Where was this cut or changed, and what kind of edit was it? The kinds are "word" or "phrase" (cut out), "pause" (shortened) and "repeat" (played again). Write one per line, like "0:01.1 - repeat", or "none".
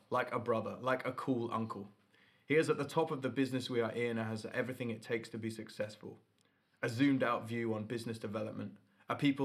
none